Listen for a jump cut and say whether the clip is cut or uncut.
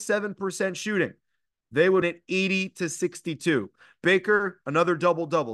cut